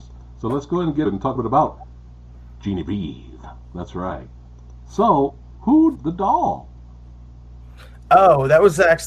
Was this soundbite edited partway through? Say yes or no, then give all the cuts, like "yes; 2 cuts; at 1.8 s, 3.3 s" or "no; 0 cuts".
yes; 3 cuts; at 1.1 s, 1.4 s, 6.0 s